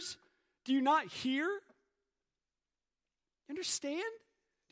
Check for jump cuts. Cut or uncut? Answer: uncut